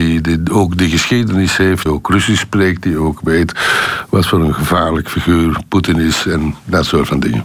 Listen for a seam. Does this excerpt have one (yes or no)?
yes